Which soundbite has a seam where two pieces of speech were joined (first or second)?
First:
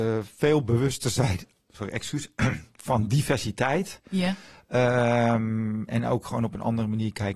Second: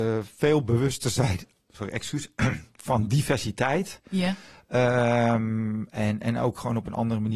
first